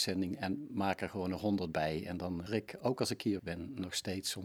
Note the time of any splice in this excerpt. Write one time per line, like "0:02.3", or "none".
0:02.5
0:03.4